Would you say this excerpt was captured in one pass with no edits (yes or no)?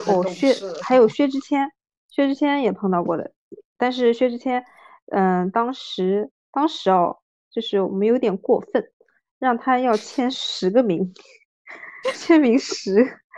yes